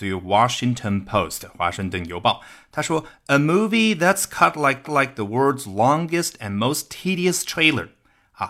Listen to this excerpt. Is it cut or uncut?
cut